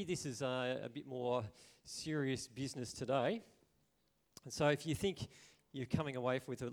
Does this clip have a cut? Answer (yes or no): no